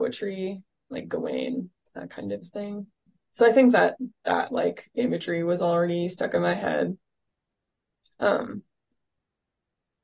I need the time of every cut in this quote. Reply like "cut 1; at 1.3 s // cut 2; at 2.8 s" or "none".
none